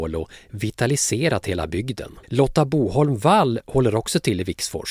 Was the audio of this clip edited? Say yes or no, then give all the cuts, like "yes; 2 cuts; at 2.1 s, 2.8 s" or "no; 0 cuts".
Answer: yes; 1 cut; at 2.2 s